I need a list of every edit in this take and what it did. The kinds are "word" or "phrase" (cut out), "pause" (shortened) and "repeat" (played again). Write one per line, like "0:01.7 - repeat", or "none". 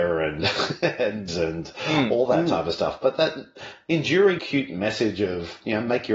0:01.3 - word
0:04.4 - word